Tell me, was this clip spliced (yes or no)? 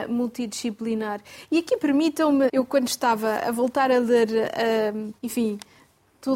yes